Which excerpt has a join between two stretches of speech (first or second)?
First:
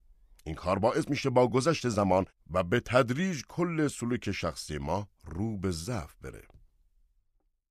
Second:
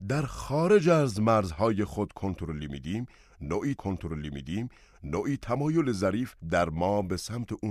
second